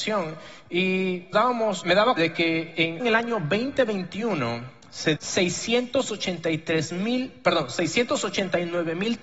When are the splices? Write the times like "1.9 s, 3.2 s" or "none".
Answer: 1.3 s, 1.8 s, 2.2 s, 3.0 s, 5.2 s